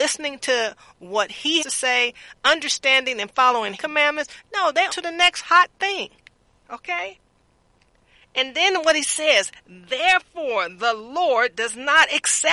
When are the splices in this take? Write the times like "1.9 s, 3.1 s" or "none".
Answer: 1.6 s, 3.8 s, 4.9 s